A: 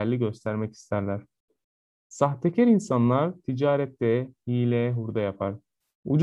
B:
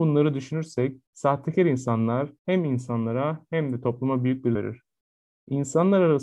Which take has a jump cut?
B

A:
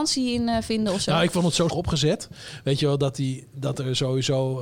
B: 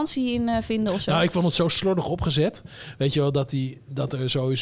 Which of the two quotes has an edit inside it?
A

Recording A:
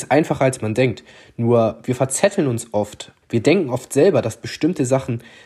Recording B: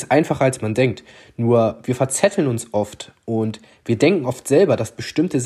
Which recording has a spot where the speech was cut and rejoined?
A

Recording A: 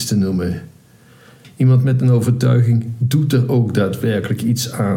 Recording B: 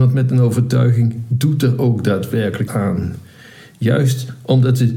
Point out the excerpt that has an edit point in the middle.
B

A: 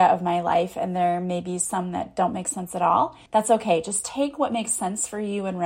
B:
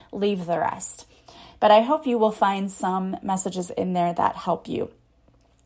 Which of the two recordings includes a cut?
A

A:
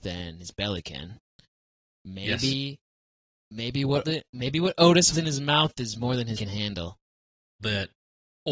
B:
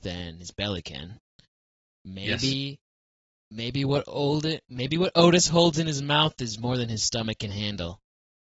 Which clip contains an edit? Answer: A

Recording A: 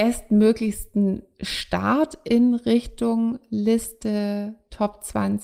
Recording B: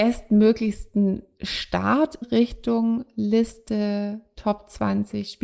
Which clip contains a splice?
B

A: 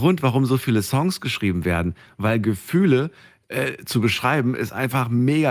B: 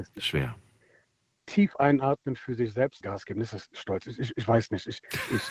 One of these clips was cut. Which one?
B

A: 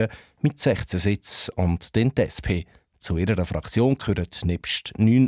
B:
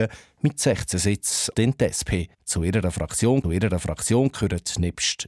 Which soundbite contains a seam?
B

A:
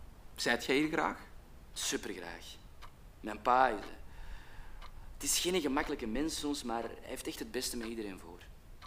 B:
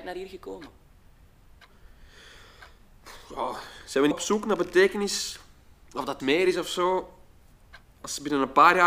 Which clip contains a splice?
B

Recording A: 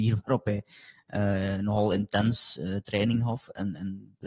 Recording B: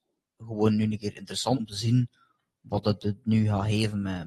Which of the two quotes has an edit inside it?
B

